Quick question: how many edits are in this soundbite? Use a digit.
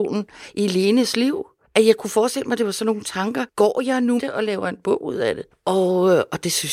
1